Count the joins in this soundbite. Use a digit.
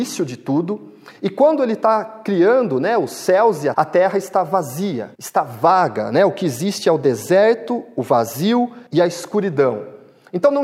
3